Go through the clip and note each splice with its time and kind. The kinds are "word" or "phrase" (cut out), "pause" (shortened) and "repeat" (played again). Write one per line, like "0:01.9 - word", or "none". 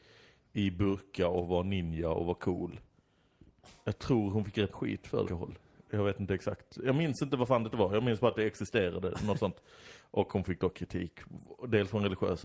0:04.7 - word
0:05.3 - phrase